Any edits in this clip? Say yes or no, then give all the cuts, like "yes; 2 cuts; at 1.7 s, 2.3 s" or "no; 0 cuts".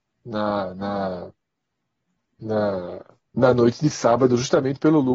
yes; 1 cut; at 3.3 s